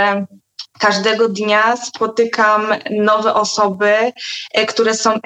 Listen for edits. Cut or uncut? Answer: uncut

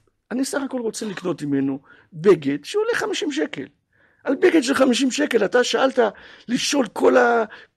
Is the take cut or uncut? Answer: uncut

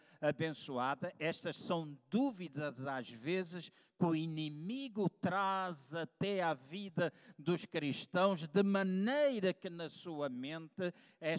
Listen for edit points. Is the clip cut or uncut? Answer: uncut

